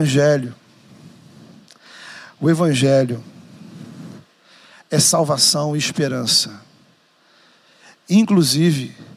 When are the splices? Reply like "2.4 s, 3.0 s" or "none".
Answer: none